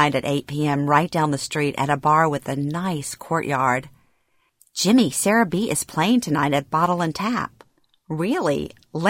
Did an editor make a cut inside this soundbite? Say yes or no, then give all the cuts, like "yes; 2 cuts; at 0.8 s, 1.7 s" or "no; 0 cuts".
no; 0 cuts